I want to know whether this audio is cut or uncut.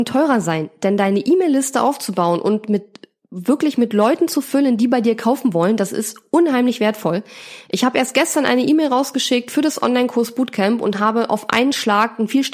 uncut